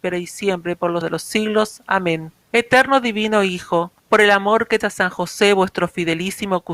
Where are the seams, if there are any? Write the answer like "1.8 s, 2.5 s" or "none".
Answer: 1.0 s, 2.4 s, 4.0 s, 4.8 s